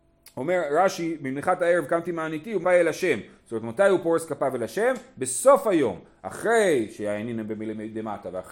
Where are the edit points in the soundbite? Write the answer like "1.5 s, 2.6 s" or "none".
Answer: 2.6 s